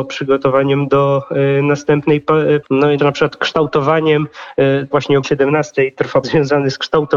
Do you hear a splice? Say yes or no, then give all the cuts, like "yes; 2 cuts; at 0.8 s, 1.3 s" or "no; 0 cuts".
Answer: yes; 5 cuts; at 2.6 s, 3.0 s, 4.9 s, 5.2 s, 6.2 s